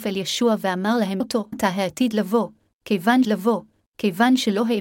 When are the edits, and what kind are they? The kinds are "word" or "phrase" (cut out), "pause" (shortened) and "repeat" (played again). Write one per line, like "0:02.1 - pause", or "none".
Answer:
0:01.2 - word
0:01.5 - word
0:03.2 - repeat